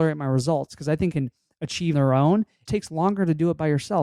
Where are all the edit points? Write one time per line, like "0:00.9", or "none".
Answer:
0:01.1
0:01.9
0:02.7